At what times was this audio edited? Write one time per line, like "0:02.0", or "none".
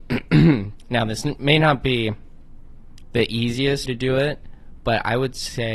0:03.8